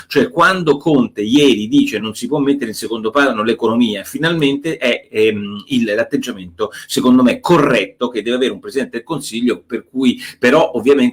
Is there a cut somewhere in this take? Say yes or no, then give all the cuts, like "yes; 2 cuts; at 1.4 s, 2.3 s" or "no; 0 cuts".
no; 0 cuts